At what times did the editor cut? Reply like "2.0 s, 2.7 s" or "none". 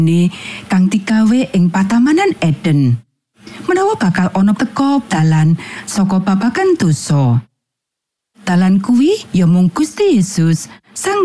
4.5 s, 5.1 s